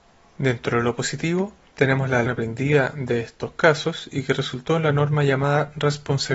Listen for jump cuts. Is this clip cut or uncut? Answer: cut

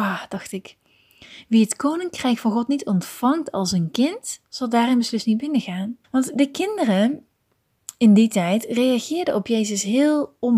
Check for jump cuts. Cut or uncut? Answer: cut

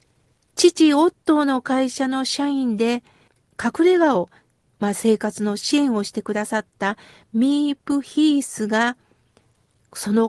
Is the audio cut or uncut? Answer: uncut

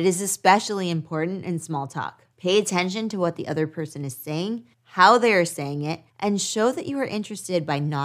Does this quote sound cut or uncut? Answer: cut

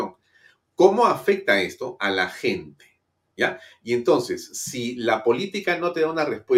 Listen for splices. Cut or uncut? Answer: uncut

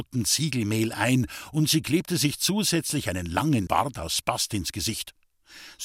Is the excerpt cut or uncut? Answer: cut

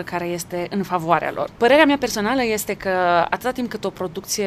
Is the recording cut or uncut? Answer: uncut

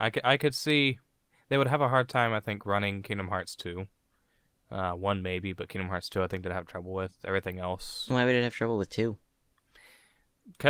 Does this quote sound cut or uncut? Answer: uncut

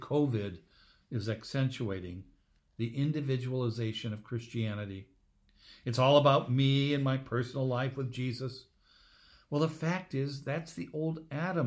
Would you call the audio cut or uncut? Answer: uncut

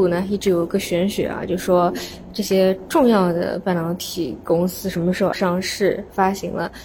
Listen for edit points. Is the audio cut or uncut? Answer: cut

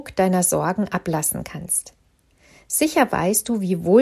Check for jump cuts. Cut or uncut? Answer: uncut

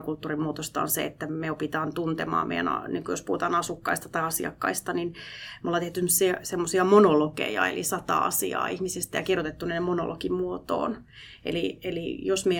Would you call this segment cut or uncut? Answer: uncut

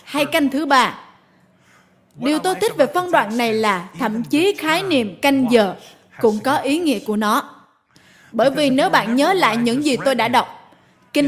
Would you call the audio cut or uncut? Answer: uncut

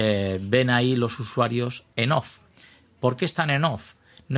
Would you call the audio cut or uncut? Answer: uncut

